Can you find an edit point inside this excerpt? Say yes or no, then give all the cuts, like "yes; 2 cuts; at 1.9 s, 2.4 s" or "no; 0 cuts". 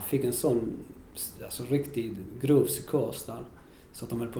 no; 0 cuts